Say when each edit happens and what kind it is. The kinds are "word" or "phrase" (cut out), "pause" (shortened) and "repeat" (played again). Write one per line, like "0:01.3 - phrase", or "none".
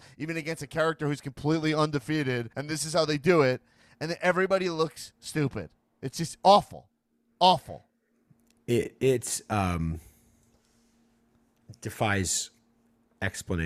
0:02.5 - pause